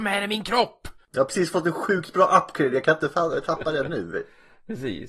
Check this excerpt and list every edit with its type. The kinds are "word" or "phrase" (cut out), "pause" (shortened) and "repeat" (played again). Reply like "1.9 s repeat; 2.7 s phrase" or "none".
none